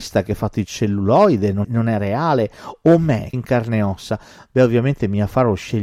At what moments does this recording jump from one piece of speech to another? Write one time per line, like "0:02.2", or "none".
0:01.6
0:03.3